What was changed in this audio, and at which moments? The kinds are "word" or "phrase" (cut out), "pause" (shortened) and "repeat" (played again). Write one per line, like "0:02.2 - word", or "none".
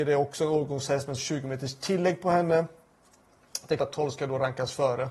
0:01.2 - word
0:03.8 - word